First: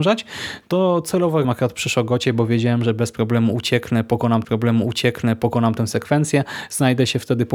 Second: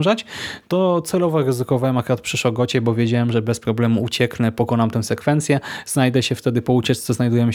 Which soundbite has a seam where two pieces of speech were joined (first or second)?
first